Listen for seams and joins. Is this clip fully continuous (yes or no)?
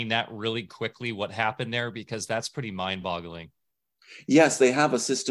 yes